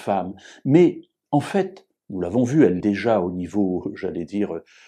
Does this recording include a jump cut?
yes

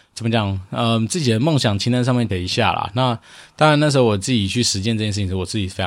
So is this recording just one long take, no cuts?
no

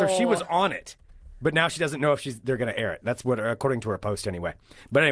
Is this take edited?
no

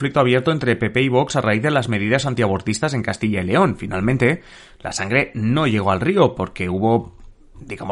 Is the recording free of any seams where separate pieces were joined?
yes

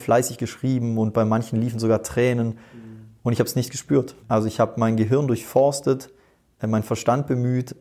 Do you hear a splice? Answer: yes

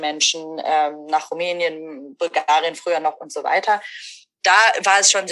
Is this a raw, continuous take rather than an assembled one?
yes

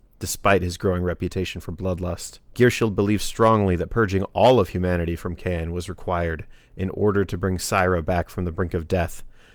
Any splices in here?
yes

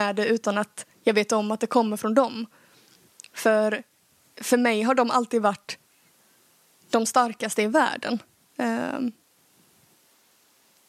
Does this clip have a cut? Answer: no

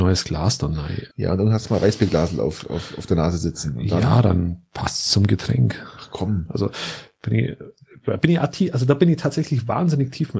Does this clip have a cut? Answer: yes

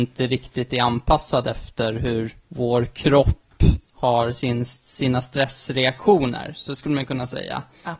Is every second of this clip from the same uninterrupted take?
no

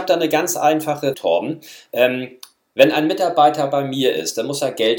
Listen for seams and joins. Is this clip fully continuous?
no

